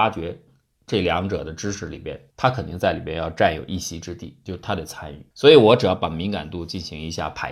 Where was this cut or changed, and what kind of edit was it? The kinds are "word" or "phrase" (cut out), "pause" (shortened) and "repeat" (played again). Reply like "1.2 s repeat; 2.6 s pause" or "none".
2.3 s pause; 5.3 s pause